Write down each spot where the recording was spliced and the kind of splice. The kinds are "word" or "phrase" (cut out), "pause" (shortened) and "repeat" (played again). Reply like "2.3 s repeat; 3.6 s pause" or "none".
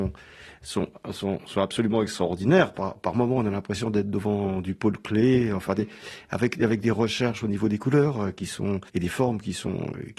8.9 s pause